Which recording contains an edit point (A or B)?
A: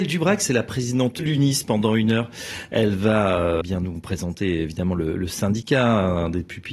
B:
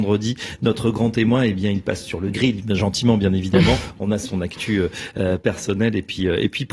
A